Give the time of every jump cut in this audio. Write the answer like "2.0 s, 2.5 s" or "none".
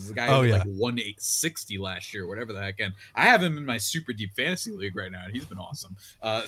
none